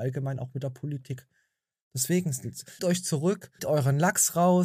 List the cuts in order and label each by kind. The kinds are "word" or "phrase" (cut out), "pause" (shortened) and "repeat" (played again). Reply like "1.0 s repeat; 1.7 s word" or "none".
2.8 s word; 3.6 s word